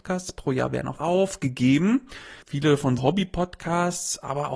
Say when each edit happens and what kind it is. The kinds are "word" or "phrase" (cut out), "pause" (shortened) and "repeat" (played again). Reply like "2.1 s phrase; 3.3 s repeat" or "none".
1.0 s word; 2.4 s pause; 3.0 s word